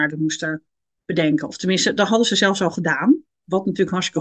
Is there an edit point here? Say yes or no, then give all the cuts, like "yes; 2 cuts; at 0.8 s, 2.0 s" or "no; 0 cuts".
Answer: no; 0 cuts